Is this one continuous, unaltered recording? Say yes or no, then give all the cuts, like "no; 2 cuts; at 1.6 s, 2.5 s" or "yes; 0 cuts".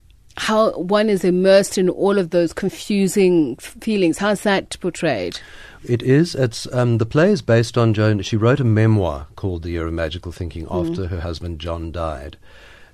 yes; 0 cuts